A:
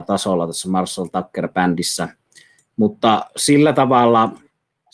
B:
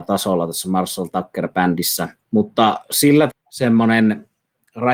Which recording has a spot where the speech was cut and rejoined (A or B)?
B